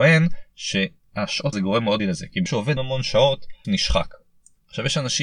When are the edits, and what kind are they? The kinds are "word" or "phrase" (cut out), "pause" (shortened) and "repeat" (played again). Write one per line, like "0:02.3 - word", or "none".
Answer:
0:01.5 - word
0:02.0 - word
0:02.5 - word
0:02.8 - word
0:03.6 - word